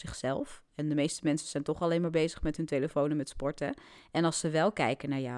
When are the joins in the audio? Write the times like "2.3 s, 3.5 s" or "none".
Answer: none